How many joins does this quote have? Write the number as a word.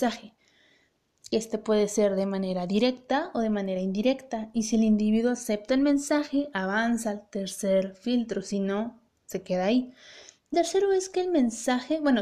one